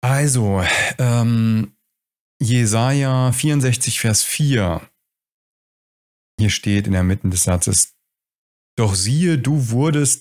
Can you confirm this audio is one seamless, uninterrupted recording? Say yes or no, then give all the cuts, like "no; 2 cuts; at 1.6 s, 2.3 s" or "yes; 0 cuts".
yes; 0 cuts